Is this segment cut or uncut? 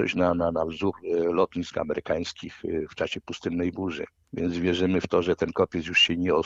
uncut